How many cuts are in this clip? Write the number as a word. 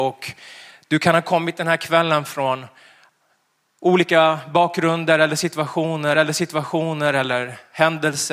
one